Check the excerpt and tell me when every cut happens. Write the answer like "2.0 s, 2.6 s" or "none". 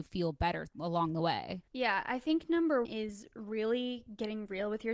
1.7 s, 2.8 s